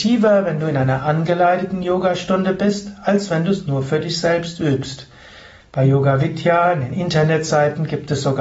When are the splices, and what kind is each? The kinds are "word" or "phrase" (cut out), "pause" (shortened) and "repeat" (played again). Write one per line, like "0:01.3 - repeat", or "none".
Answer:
none